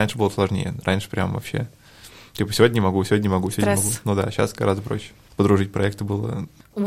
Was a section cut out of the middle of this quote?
no; 0 cuts

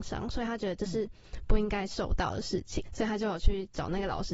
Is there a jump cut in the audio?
yes; 1 cut; at 2.9 s

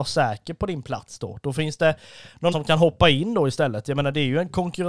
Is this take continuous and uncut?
no; 1 cut; at 2.5 s

